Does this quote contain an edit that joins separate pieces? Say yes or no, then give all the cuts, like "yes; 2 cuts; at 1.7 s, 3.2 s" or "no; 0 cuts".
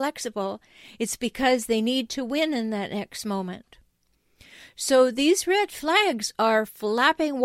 no; 0 cuts